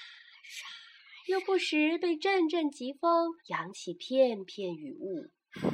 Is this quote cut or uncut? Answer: cut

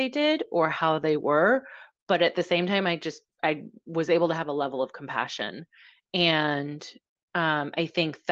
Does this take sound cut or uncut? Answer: uncut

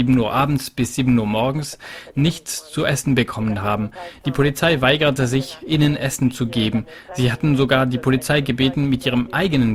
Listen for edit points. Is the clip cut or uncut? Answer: uncut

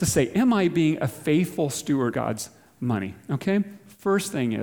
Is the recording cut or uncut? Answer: cut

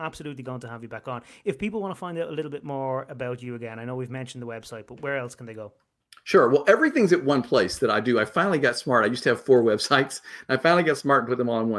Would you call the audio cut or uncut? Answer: cut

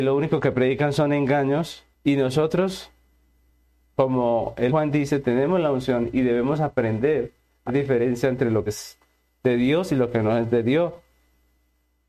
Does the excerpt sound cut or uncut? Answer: cut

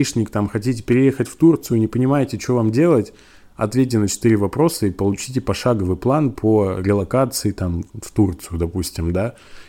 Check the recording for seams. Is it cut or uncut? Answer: uncut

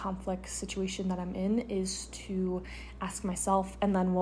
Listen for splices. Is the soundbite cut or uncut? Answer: uncut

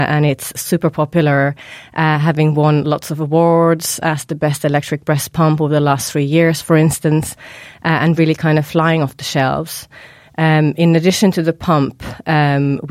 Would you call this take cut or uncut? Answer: uncut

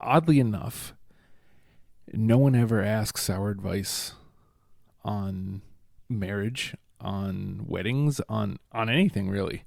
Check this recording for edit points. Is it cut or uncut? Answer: cut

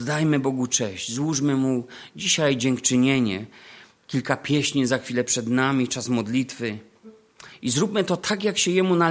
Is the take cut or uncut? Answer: uncut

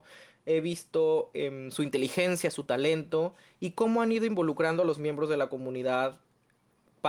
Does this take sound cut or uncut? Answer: uncut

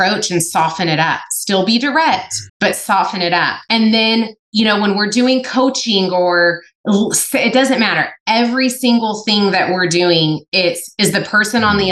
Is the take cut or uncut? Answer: cut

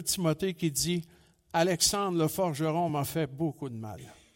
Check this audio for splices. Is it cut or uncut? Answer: uncut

